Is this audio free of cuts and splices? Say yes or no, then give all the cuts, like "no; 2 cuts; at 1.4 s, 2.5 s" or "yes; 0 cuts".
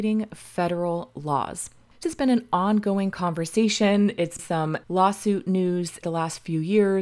no; 4 cuts; at 2.0 s, 4.4 s, 4.8 s, 6.0 s